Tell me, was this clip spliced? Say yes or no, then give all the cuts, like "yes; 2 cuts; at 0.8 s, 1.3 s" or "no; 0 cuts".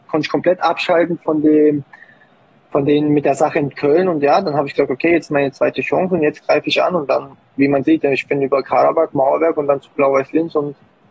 no; 0 cuts